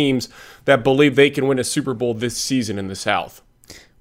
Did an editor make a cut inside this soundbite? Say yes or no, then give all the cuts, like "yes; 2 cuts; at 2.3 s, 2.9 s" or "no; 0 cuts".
no; 0 cuts